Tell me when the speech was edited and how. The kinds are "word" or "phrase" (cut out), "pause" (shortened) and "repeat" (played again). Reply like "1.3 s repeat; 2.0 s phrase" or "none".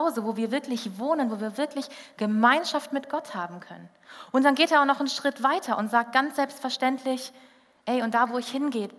none